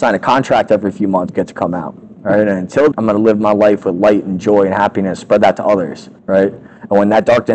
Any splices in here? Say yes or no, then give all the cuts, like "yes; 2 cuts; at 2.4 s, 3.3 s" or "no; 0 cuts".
yes; 4 cuts; at 1.3 s, 2.1 s, 2.9 s, 6.2 s